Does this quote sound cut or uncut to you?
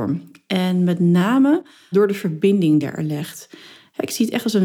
cut